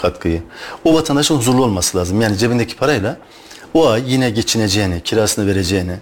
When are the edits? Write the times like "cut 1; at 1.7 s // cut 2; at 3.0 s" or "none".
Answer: none